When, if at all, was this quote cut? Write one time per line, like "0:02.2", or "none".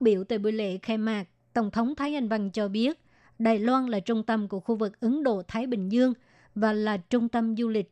none